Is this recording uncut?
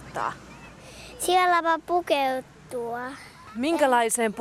yes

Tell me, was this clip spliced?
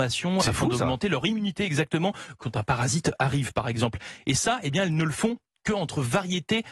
no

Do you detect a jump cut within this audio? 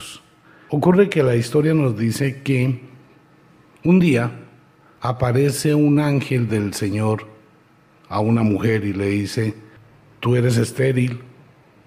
no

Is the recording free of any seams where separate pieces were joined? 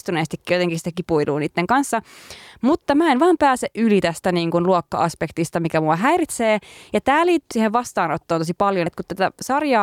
no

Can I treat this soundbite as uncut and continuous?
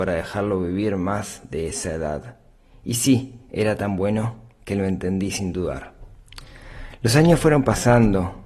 yes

